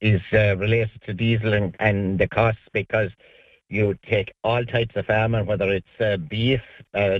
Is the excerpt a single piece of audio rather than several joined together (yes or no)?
yes